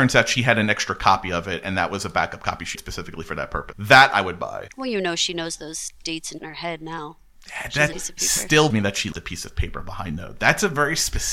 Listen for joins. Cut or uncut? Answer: cut